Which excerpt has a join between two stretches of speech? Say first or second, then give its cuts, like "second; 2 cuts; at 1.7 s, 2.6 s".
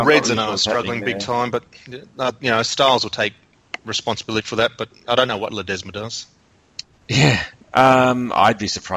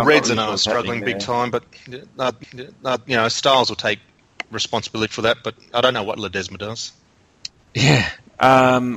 second; 1 cut; at 2.4 s